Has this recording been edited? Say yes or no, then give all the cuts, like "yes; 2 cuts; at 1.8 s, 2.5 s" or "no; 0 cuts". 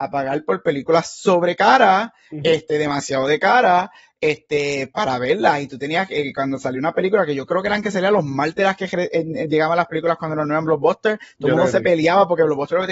no; 0 cuts